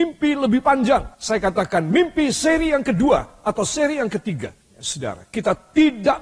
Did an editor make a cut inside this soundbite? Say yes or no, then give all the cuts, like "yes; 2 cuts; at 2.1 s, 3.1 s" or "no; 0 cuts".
yes; 2 cuts; at 1.1 s, 4.6 s